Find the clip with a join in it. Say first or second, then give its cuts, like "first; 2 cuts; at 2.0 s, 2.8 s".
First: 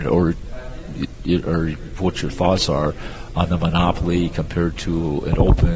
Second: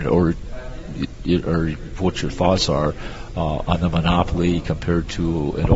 first; 1 cut; at 3.3 s